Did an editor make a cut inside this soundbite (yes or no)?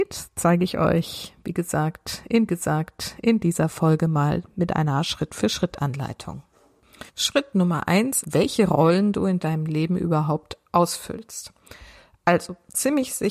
yes